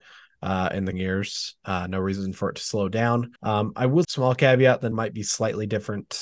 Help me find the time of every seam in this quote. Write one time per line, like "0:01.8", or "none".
0:00.9
0:03.4
0:04.0
0:04.9